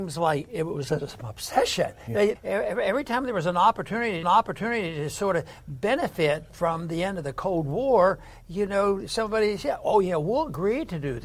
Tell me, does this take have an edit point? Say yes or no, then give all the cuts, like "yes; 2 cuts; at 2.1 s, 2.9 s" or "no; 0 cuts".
yes; 3 cuts; at 2.4 s, 4.2 s, 6.5 s